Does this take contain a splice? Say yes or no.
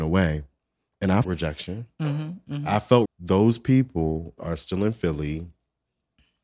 yes